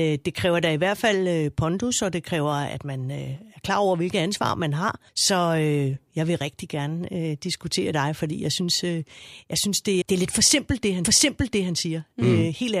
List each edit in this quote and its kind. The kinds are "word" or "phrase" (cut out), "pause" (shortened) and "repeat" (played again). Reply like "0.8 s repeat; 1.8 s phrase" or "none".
5.1 s pause; 7.9 s phrase; 10.0 s word; 11.0 s repeat